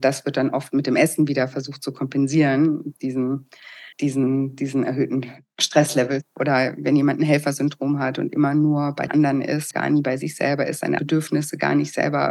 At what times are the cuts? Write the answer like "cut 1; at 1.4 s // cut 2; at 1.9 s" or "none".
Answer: cut 1; at 3.9 s // cut 2; at 9.1 s // cut 3; at 9.7 s // cut 4; at 11.0 s